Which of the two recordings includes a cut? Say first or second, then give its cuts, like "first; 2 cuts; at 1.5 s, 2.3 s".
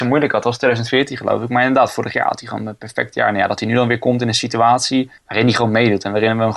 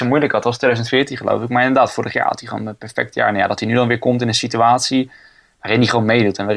first; 1 cut; at 5.2 s